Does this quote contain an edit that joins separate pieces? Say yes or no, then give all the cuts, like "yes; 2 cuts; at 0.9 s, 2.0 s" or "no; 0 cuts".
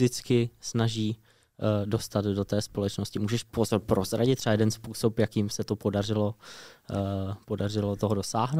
no; 0 cuts